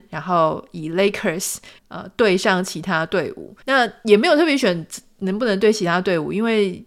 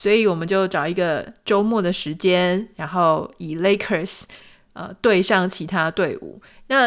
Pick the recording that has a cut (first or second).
first